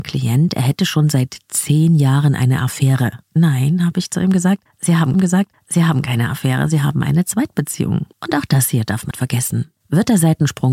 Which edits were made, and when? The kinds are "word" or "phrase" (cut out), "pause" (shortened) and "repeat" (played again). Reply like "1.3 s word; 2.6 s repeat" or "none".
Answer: 3.2 s pause; 5.1 s repeat; 8.1 s pause; 9.1 s word